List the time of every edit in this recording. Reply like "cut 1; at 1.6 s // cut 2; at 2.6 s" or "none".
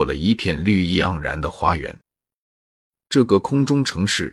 none